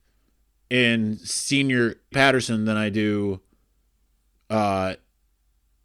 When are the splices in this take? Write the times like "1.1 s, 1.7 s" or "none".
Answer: 2.1 s

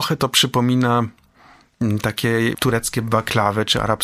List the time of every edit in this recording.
2.5 s

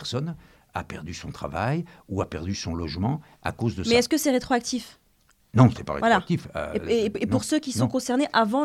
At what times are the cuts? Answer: none

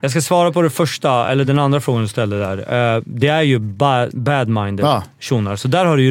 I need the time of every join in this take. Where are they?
none

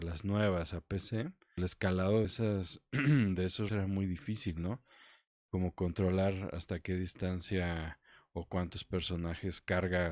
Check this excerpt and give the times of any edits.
1.6 s, 2.2 s, 3.7 s

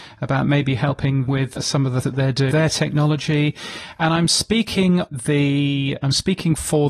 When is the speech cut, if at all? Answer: 1.3 s, 2.0 s, 2.5 s, 5.1 s

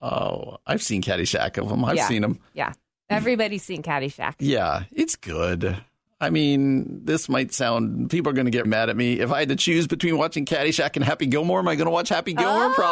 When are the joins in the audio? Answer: 1.6 s, 8.6 s

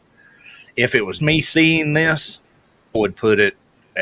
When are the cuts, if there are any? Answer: 1.2 s, 2.9 s

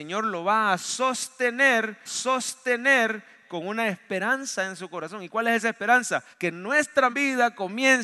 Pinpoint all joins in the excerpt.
2.1 s, 6.3 s, 7.1 s

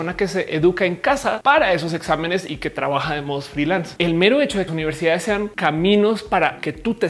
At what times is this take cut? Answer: 4.7 s

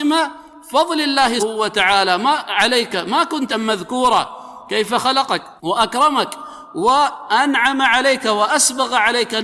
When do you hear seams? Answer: 1.4 s, 3.5 s, 5.6 s

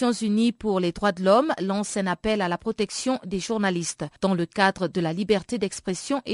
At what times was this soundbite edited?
4.2 s

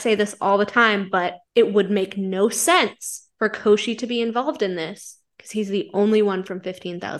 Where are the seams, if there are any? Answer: 1.4 s, 3.3 s

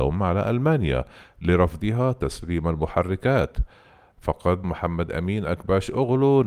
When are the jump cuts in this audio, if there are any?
4.6 s

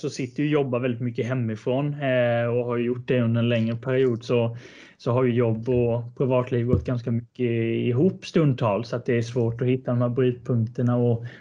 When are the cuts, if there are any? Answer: none

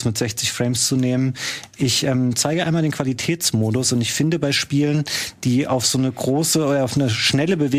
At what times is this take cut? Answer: none

